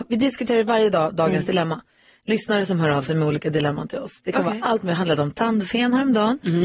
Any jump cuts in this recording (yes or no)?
no